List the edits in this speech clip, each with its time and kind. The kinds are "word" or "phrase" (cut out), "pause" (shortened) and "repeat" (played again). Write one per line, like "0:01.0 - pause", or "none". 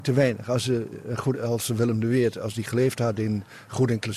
0:01.3 - word